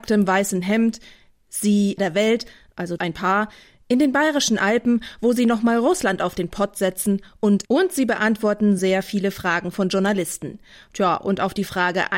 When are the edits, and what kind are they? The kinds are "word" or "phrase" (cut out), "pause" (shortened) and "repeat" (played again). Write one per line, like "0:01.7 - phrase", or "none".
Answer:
0:02.0 - phrase
0:03.0 - word
0:07.6 - phrase
0:08.8 - word